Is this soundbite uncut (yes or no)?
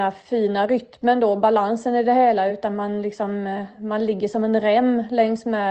yes